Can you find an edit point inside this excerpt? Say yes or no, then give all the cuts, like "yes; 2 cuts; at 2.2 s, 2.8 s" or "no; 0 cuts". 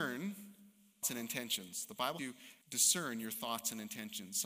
yes; 3 cuts; at 1.0 s, 2.2 s, 2.6 s